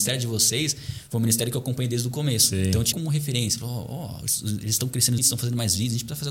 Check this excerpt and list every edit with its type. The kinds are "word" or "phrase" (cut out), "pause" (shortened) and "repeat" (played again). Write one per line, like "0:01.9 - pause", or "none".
0:02.9 - word
0:05.2 - word